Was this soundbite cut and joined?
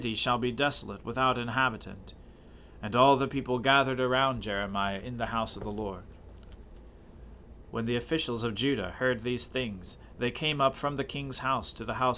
no; 0 cuts

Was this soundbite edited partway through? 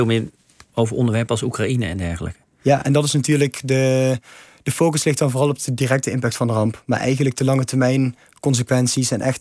no; 0 cuts

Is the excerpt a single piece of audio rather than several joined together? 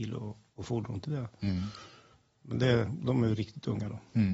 yes; 0 cuts

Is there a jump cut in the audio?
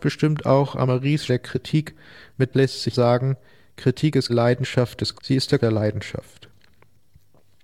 yes; 6 cuts; at 1.3 s, 2.5 s, 2.9 s, 4.3 s, 5.1 s, 5.6 s

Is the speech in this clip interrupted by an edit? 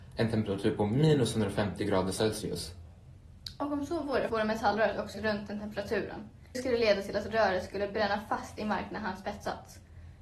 yes; 3 cuts; at 4.3 s, 5.1 s, 6.5 s

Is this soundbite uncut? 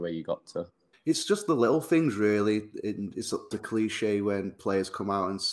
no; 2 cuts; at 0.9 s, 3.5 s

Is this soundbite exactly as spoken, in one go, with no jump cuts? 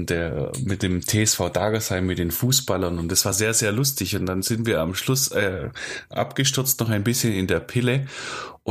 yes; 0 cuts

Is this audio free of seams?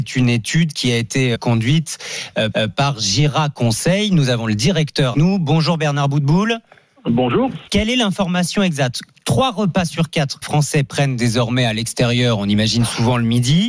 no; 5 cuts; at 1.3 s, 2.5 s, 5.1 s, 7.7 s, 10.4 s

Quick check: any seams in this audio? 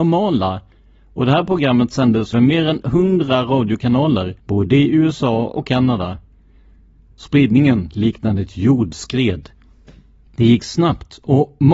yes; 2 cuts; at 2.3 s, 4.4 s

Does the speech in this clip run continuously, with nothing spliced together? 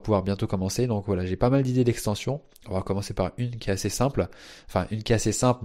yes; 0 cuts

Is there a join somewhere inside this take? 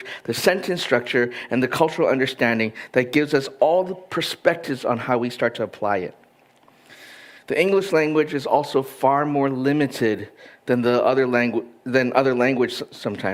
no; 0 cuts

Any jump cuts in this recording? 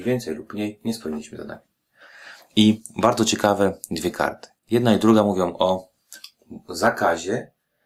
yes; 1 cut; at 4.6 s

